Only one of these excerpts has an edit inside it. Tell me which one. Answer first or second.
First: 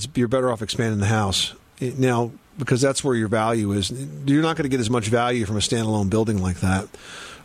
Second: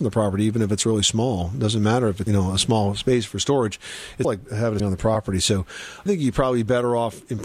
second